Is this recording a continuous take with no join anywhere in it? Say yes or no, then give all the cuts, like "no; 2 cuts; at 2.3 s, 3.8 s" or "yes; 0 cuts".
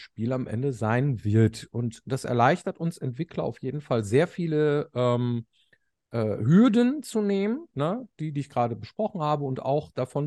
yes; 0 cuts